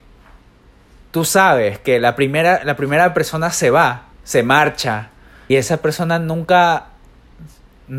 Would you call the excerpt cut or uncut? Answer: cut